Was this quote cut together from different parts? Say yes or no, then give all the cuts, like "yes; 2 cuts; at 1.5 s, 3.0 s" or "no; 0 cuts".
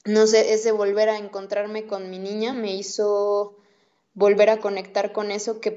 no; 0 cuts